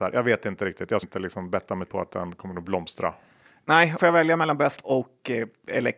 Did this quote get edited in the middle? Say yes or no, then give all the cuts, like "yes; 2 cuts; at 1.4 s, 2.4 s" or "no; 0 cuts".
yes; 4 cuts; at 1.0 s, 1.9 s, 4.0 s, 4.8 s